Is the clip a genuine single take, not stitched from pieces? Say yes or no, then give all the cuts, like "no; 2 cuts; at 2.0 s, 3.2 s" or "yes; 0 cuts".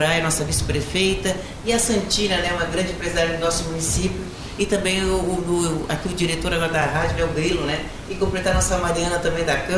yes; 0 cuts